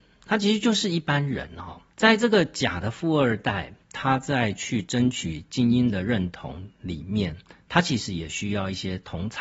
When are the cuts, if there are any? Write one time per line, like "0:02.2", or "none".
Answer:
0:01.9